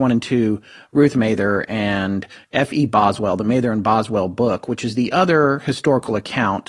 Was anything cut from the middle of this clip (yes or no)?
no